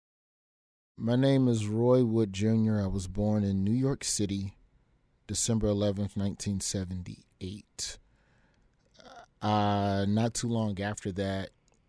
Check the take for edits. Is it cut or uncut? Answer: uncut